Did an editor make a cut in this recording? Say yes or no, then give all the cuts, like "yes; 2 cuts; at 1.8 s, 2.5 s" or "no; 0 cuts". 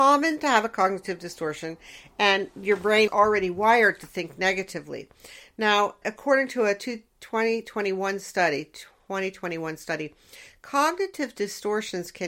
yes; 2 cuts; at 3.1 s, 6.0 s